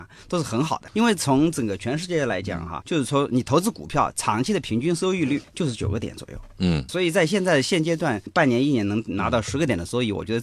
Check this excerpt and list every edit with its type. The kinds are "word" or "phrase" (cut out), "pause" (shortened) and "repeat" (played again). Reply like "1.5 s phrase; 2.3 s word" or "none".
2.8 s word; 6.9 s word